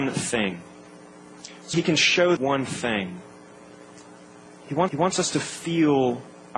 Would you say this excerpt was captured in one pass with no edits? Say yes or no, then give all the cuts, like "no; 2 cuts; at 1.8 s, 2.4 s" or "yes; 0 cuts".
no; 3 cuts; at 1.7 s, 2.4 s, 4.9 s